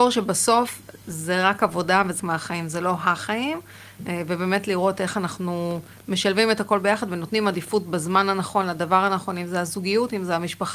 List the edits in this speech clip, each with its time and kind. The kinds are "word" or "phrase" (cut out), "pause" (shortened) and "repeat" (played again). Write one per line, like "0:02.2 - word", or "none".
0:02.2 - word